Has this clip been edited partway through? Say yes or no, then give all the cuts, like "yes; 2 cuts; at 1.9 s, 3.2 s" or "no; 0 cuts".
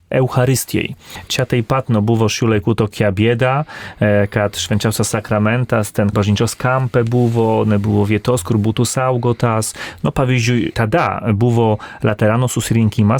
yes; 1 cut; at 6.1 s